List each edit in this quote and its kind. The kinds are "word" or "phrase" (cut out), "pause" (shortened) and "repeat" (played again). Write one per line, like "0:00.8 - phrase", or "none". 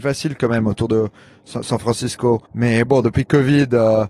0:02.5 - pause

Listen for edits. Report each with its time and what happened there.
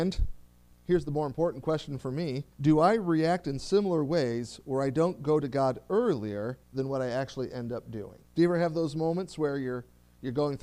0:02.5 - pause
0:06.6 - pause
0:08.2 - pause

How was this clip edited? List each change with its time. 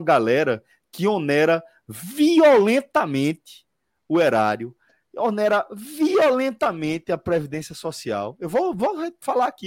none

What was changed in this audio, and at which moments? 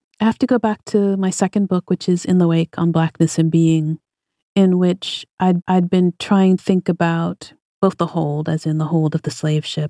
0:05.6 - repeat
0:06.6 - word

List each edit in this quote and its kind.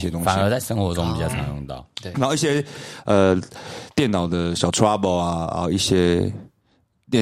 none

